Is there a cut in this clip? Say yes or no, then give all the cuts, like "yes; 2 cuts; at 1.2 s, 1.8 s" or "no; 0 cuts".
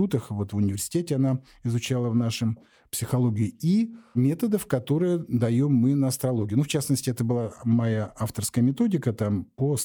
no; 0 cuts